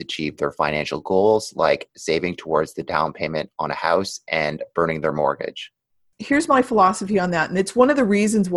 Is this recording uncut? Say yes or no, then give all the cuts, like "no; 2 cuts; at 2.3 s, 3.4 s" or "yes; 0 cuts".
yes; 0 cuts